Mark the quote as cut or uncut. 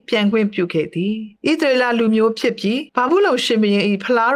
cut